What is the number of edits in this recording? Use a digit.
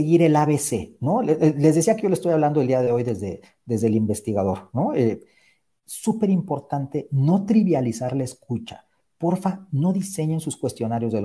0